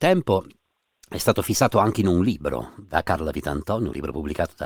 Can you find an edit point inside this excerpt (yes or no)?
no